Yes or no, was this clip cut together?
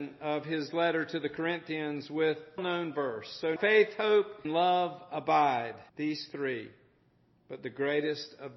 yes